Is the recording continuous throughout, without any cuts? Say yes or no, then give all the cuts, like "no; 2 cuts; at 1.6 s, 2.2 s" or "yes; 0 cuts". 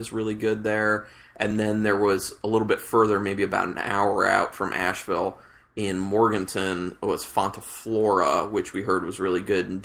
yes; 0 cuts